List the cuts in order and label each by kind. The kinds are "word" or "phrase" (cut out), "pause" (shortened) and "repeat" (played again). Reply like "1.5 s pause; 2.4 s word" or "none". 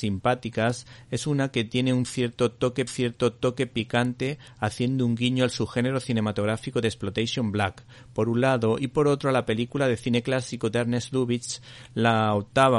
2.9 s repeat

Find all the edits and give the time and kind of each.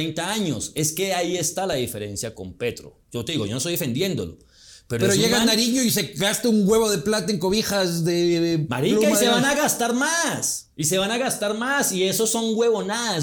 none

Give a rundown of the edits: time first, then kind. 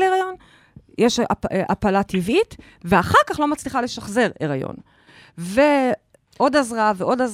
none

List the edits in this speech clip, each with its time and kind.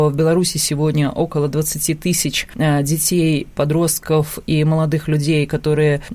none

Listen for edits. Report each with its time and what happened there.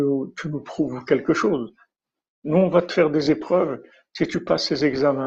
none

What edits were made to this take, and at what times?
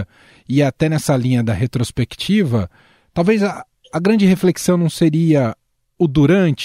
none

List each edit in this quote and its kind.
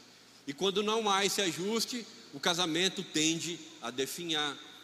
none

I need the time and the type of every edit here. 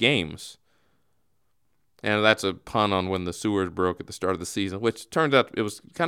none

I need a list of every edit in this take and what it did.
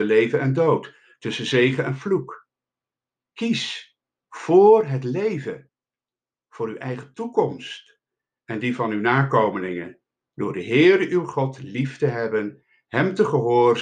none

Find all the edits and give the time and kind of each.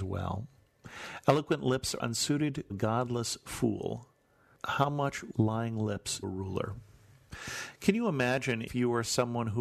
2.0 s word; 2.7 s word; 5.3 s word; 6.2 s word; 8.7 s word

